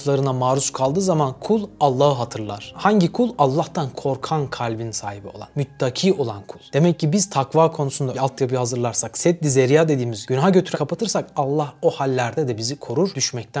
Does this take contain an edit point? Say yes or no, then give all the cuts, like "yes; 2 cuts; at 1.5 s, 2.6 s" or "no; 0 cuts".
yes; 2 cuts; at 8.1 s, 10.7 s